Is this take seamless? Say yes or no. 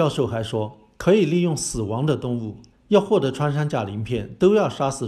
no